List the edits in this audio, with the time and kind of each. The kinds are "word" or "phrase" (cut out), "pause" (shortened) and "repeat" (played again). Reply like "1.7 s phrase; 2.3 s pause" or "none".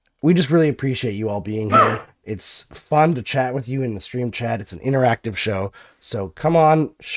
none